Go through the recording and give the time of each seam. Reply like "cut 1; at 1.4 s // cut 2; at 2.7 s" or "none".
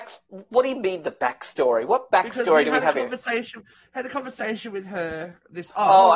none